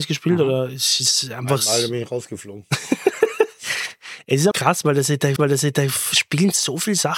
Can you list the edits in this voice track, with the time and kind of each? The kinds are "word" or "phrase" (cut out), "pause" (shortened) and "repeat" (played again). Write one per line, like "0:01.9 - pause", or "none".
0:04.5 - word
0:05.4 - repeat